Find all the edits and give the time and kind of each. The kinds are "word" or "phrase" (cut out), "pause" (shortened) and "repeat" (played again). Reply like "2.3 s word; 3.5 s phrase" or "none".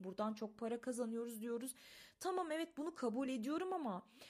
none